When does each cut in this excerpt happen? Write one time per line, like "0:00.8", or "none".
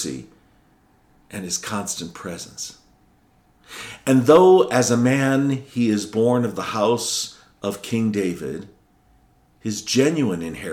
none

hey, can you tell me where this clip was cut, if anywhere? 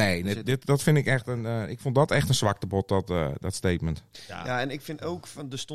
none

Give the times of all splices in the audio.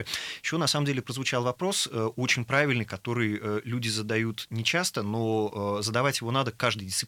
none

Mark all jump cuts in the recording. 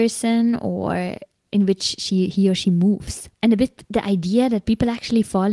0:03.3

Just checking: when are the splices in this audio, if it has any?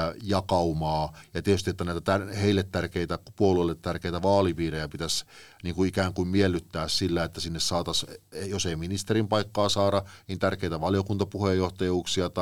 none

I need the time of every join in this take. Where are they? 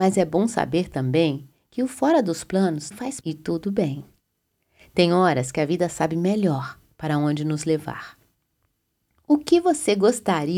0:02.9
0:03.2

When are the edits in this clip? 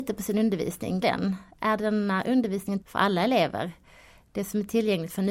0:01.0
0:02.8

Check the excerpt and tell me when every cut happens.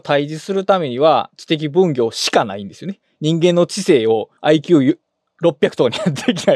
0:04.4

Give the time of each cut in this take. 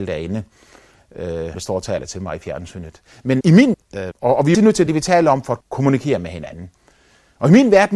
0:01.5
0:03.4
0:03.7
0:04.1
0:04.5
0:04.9
0:05.6

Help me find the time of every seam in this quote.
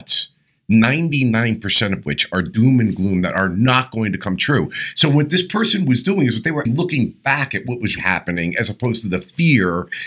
0:06.7
0:08.0

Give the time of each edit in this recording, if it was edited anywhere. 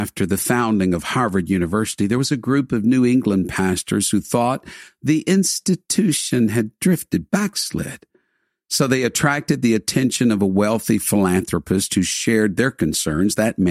none

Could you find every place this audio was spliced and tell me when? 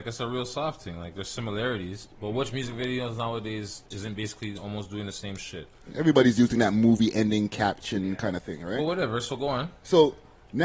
0:02.1
0:03.9

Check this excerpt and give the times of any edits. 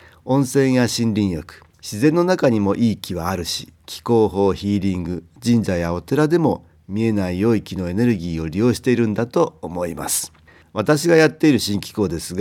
0:01.7
0:03.8
0:10.5

